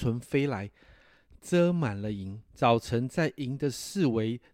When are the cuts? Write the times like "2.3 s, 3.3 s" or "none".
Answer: 2.5 s